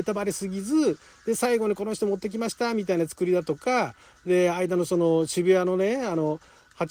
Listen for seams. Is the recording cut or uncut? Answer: uncut